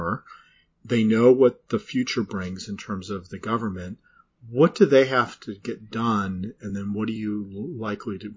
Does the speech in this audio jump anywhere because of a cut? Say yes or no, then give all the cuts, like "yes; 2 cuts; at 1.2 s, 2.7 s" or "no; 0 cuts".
no; 0 cuts